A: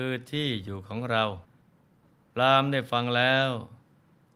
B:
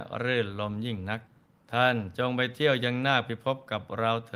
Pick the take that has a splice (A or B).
B